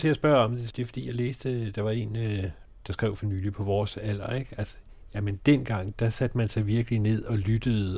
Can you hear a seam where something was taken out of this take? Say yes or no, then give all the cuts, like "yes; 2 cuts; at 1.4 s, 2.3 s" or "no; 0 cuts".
yes; 1 cut; at 5.9 s